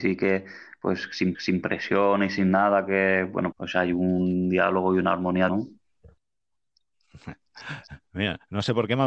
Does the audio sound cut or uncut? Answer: cut